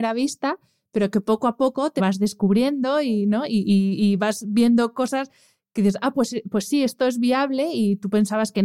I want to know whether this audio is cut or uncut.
cut